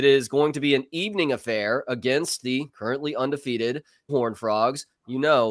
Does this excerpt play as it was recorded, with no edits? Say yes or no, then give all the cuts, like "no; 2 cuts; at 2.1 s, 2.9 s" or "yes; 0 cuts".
no; 1 cut; at 4.1 s